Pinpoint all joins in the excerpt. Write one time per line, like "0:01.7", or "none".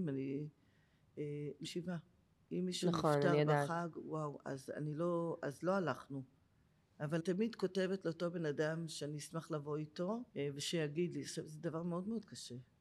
0:01.6
0:07.2
0:10.3